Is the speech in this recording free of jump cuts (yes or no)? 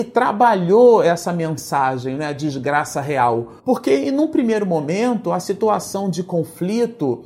no